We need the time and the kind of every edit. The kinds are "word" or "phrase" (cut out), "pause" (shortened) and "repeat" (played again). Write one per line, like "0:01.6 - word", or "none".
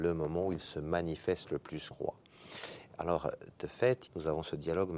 0:01.9 - word
0:04.1 - word